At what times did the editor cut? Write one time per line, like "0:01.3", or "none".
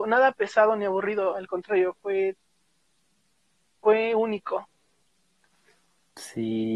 none